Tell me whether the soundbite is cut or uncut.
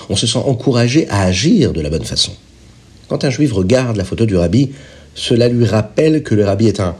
uncut